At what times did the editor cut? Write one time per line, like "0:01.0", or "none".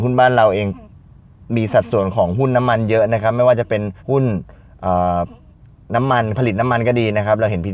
0:04.0
0:05.5